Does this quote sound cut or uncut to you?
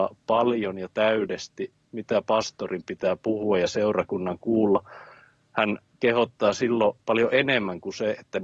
uncut